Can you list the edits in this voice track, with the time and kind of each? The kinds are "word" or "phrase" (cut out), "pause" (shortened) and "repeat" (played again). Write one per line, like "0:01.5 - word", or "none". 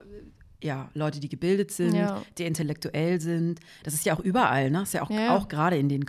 none